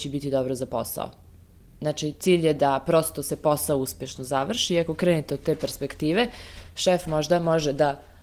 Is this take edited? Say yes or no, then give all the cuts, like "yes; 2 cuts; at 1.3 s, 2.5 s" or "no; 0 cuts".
no; 0 cuts